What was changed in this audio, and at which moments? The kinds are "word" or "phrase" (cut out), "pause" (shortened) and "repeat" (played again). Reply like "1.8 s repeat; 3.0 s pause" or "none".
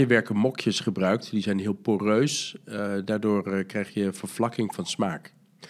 none